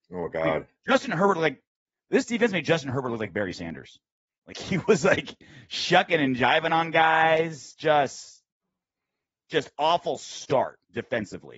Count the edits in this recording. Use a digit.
0